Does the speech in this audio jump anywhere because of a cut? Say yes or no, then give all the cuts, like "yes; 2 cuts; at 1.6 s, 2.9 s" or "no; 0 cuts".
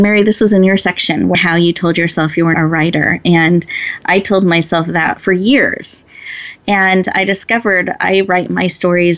yes; 3 cuts; at 1.3 s, 2.5 s, 5.2 s